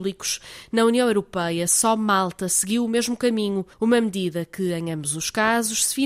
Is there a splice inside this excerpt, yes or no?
yes